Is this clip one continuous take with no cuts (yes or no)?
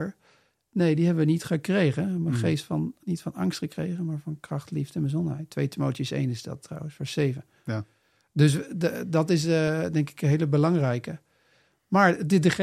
yes